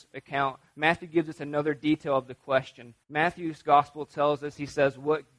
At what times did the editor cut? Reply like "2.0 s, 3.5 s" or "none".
3.0 s